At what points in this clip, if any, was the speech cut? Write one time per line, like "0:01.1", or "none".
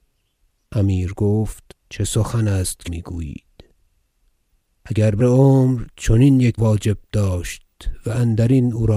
0:01.8
0:02.9
0:05.2
0:06.6